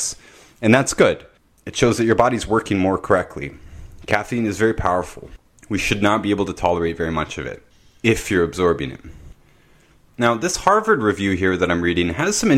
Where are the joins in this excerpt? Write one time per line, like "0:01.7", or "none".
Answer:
none

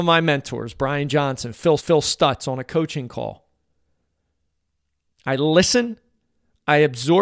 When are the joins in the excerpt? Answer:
0:01.8

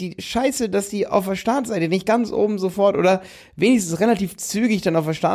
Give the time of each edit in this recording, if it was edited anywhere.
none

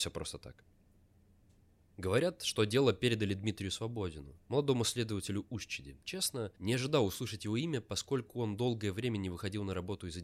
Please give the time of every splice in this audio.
0:06.0

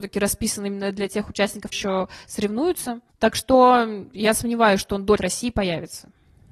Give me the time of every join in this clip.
0:01.7
0:03.1
0:05.2

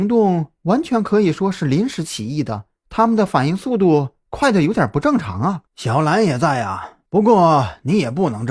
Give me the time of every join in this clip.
0:02.8
0:05.7
0:07.1

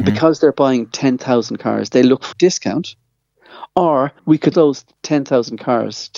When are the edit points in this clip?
0:02.3
0:04.2
0:04.5

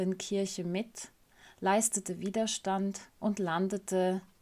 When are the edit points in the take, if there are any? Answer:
0:03.1

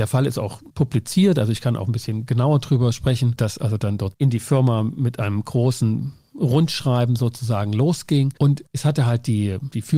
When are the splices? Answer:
none

